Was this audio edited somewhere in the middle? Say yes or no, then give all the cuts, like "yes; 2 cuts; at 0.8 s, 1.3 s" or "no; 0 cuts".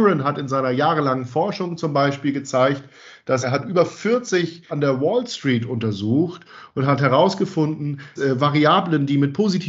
yes; 3 cuts; at 3.4 s, 4.7 s, 8.2 s